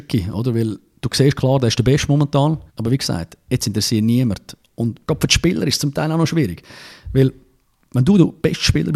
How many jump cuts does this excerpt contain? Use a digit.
2